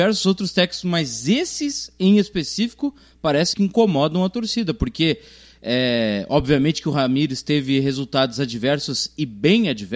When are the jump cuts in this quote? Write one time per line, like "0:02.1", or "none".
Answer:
0:03.5

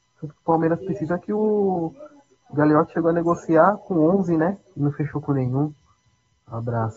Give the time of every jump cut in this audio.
none

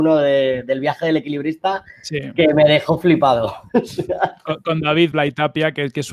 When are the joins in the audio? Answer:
0:05.1

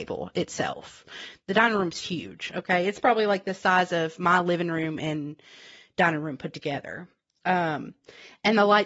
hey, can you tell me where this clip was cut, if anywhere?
none

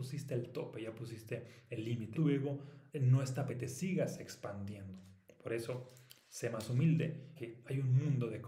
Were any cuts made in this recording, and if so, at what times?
0:02.1
0:02.9
0:03.5
0:07.4

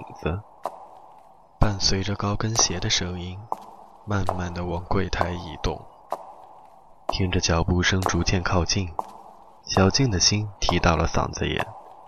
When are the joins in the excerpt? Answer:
none

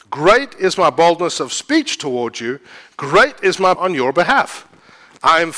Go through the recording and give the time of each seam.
0:03.7

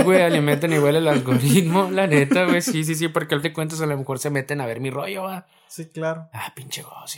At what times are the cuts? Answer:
0:03.4

